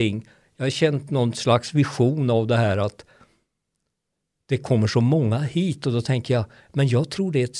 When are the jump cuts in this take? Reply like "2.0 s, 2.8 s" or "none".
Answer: none